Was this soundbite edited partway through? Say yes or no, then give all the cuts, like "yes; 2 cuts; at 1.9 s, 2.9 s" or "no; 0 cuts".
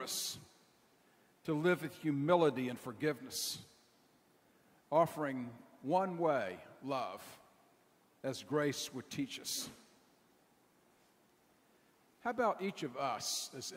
no; 0 cuts